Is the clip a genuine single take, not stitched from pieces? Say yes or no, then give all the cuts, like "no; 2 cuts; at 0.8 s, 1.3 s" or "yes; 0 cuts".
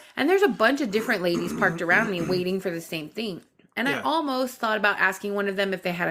yes; 0 cuts